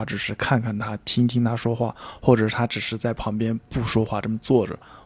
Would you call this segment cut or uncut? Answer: uncut